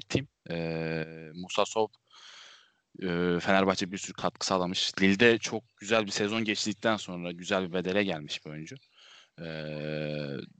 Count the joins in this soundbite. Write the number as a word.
zero